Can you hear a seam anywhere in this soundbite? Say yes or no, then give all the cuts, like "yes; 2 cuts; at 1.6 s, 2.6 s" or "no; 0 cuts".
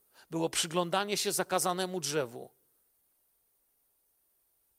no; 0 cuts